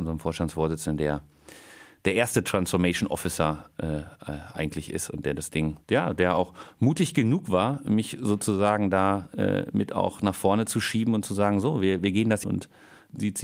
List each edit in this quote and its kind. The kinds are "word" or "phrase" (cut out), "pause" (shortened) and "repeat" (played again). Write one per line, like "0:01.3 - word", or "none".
0:05.8 - pause
0:12.4 - phrase